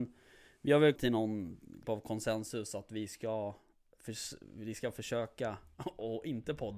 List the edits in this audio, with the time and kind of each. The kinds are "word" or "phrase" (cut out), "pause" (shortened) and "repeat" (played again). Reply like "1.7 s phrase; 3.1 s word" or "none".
1.0 s phrase; 1.8 s word